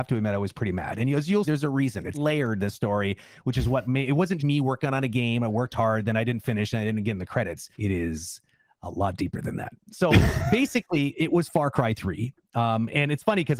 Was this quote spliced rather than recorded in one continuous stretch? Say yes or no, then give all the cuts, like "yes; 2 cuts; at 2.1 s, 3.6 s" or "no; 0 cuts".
yes; 4 cuts; at 1.4 s, 2.1 s, 4.4 s, 7.7 s